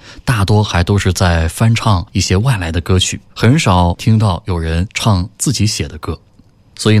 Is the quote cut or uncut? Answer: cut